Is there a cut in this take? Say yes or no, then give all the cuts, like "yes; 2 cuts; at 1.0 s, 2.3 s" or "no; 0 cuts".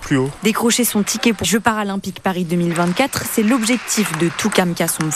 yes; 1 cut; at 1.4 s